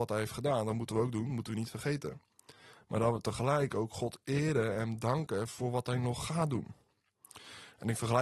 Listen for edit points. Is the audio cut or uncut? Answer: uncut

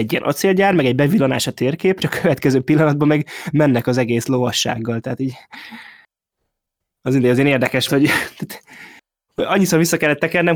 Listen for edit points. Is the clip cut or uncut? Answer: cut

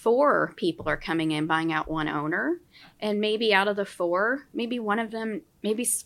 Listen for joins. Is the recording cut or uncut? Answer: uncut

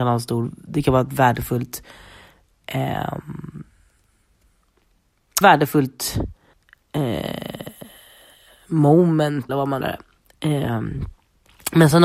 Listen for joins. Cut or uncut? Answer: cut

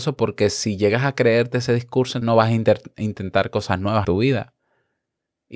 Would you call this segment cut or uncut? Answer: cut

